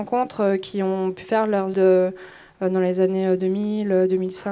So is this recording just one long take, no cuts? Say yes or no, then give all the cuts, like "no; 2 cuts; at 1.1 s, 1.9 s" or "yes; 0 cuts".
no; 1 cut; at 1.7 s